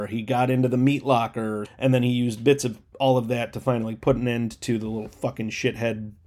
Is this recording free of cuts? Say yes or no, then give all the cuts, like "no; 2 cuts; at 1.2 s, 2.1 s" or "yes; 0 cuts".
no; 1 cut; at 1.7 s